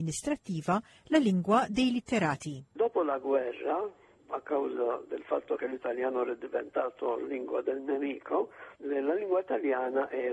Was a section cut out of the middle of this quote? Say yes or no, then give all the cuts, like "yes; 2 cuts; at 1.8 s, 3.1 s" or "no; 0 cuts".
yes; 1 cut; at 8.7 s